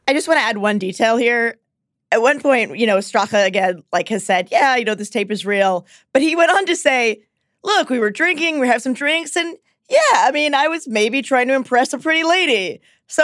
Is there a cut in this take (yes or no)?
no